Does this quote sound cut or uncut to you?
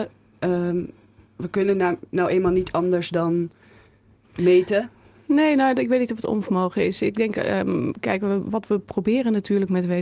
uncut